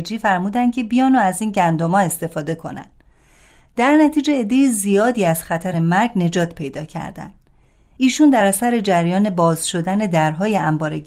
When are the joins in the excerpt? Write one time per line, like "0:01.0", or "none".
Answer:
none